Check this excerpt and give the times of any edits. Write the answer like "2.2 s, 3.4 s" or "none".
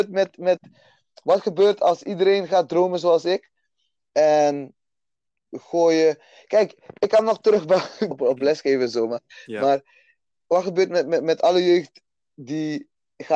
5.5 s, 8.1 s